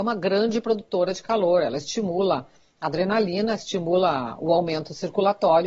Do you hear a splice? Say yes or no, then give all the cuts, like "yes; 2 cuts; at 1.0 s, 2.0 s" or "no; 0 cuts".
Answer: no; 0 cuts